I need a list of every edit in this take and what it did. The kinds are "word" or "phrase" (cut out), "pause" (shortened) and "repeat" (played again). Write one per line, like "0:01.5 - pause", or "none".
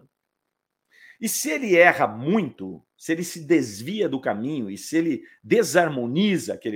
0:02.9 - pause